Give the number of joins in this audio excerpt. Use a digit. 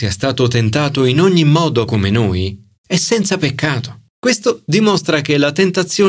3